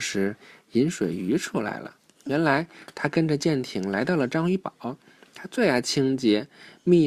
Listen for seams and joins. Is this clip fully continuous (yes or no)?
yes